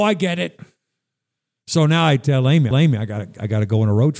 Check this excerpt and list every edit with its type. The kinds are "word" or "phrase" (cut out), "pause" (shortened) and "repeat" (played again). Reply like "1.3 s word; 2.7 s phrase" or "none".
2.7 s repeat